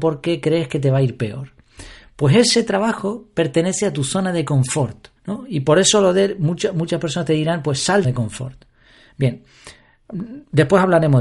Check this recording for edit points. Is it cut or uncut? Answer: cut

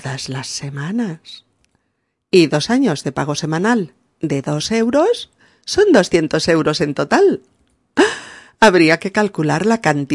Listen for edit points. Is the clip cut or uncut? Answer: uncut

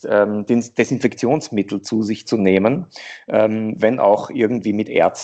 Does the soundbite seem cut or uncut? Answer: uncut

